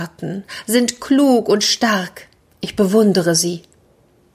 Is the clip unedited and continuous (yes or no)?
yes